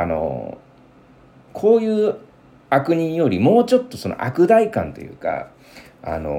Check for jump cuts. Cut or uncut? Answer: uncut